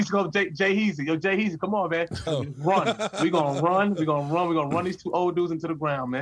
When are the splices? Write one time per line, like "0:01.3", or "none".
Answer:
0:02.3

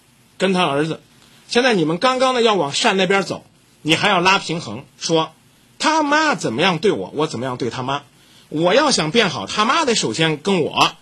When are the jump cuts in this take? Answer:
0:04.9

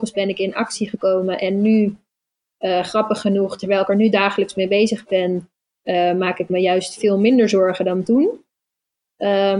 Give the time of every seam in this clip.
none

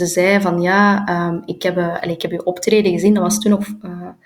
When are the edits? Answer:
none

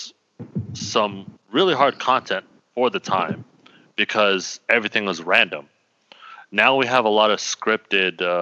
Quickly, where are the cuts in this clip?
none

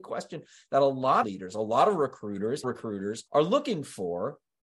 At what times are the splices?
0:01.2
0:02.6
0:03.3

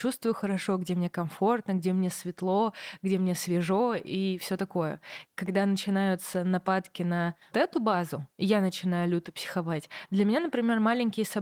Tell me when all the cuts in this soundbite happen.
0:05.3
0:07.5
0:08.3

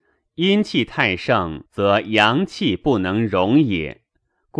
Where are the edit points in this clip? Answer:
0:01.7

